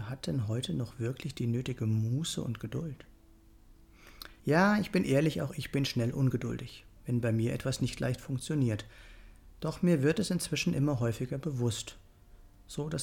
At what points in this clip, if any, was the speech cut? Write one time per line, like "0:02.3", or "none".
0:04.4
0:07.0